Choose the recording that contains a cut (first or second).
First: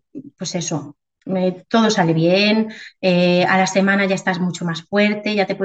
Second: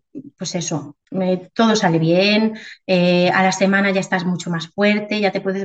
second